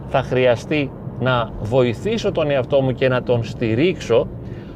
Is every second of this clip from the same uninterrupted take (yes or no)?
yes